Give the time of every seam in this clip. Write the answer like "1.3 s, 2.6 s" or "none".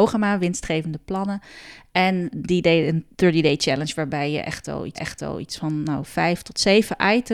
2.3 s, 3.1 s, 5.0 s